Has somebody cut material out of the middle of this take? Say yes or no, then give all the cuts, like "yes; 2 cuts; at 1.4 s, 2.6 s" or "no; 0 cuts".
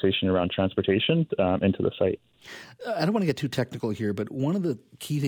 no; 0 cuts